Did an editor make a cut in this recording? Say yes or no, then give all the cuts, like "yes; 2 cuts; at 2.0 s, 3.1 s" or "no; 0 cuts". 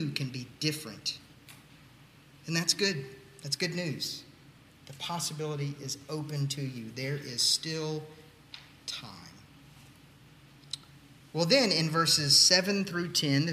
no; 0 cuts